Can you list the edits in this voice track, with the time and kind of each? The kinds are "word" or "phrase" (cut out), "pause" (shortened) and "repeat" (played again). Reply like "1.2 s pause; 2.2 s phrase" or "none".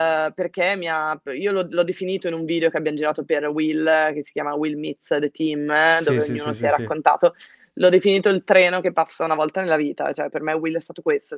1.2 s pause